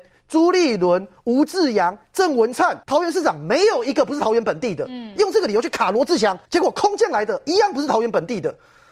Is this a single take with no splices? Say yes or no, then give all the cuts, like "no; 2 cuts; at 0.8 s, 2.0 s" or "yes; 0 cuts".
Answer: no; 2 cuts; at 2.8 s, 6.5 s